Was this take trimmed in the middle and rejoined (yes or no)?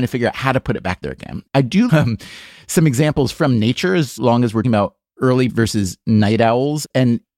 yes